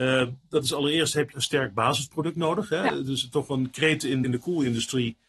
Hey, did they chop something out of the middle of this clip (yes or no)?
yes